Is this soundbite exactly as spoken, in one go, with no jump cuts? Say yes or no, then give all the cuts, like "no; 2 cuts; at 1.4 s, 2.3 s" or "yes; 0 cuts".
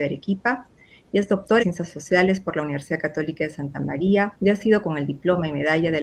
no; 3 cuts; at 1.6 s, 4.4 s, 4.8 s